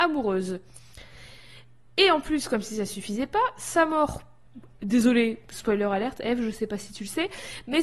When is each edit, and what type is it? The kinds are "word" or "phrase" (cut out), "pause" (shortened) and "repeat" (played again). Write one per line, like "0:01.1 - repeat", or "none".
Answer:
none